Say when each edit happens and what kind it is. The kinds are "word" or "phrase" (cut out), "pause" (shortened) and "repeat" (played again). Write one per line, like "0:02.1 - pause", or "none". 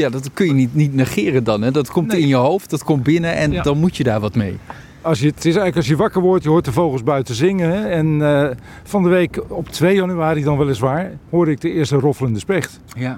none